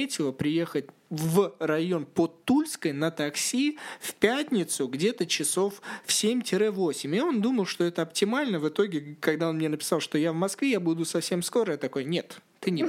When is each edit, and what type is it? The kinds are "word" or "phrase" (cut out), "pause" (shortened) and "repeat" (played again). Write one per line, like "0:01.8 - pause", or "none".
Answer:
none